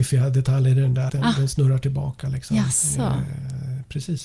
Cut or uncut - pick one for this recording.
cut